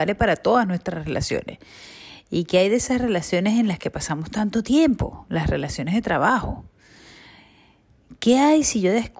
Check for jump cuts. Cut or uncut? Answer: uncut